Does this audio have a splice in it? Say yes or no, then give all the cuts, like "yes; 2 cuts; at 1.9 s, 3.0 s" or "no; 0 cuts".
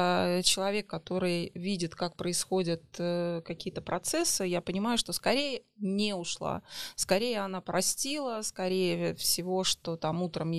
no; 0 cuts